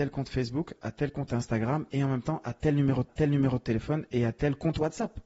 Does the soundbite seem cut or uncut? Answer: cut